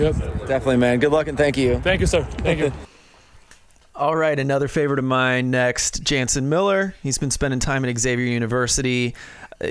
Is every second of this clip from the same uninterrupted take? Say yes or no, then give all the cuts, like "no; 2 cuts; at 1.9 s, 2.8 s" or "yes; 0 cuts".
yes; 0 cuts